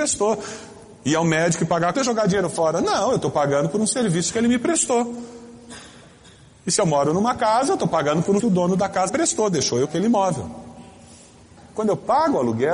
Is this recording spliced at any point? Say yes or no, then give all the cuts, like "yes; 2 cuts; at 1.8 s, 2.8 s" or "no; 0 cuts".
yes; 4 cuts; at 1.9 s, 8.4 s, 9.1 s, 9.8 s